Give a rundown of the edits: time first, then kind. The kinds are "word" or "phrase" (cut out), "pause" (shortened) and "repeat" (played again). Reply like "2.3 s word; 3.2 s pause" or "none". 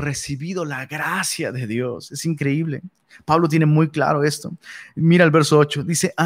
none